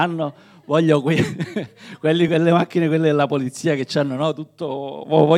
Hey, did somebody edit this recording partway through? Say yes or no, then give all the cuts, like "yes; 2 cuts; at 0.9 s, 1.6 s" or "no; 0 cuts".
no; 0 cuts